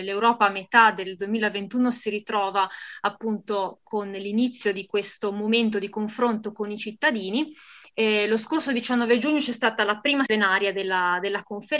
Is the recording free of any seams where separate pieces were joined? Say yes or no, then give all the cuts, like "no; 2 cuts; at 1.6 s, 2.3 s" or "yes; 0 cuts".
no; 1 cut; at 10.3 s